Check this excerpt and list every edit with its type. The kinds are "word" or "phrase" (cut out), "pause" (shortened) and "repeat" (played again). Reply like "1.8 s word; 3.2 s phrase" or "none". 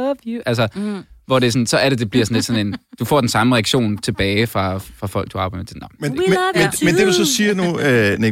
none